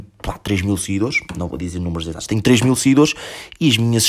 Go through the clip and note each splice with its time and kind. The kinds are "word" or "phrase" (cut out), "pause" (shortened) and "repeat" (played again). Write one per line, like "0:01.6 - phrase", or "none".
none